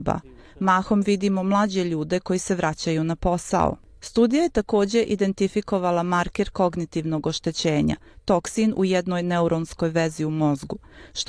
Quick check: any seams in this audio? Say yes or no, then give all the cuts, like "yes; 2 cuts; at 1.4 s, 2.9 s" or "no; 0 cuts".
no; 0 cuts